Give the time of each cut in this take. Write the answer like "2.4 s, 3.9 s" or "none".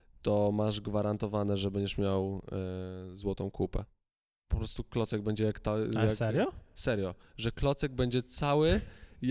4.1 s